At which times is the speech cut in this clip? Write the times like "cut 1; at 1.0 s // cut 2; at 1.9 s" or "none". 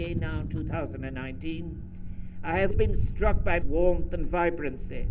cut 1; at 2.7 s // cut 2; at 3.6 s